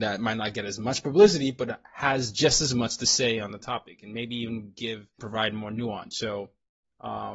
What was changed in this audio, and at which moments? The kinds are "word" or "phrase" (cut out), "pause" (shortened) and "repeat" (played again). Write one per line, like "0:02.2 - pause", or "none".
0:05.2 - word